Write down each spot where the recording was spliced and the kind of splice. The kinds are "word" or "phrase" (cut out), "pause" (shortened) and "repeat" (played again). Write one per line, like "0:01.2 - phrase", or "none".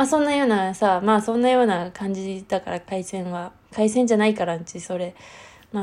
0:03.6 - pause